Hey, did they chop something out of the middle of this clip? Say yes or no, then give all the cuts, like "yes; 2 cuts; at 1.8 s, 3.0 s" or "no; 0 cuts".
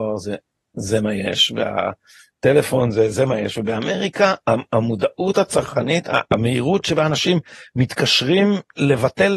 no; 0 cuts